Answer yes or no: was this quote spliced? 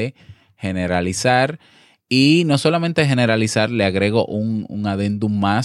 no